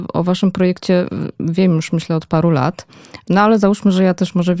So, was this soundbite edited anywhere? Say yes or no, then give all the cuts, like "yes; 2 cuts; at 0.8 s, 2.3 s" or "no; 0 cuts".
no; 0 cuts